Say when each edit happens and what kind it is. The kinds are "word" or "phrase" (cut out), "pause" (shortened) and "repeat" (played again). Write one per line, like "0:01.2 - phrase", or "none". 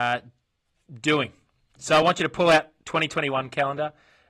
none